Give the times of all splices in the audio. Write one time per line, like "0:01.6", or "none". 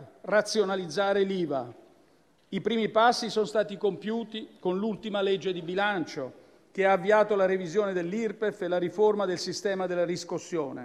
none